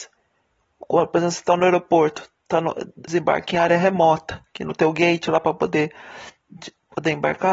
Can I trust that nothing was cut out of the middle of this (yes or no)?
no